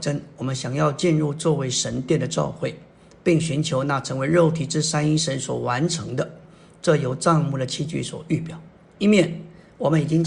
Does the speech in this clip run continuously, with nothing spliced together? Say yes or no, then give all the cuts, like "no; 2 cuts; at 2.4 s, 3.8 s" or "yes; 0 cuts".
yes; 0 cuts